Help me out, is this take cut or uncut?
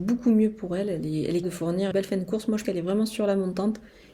cut